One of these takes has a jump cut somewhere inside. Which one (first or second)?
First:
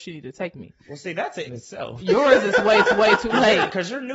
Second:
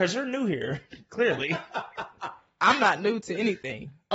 first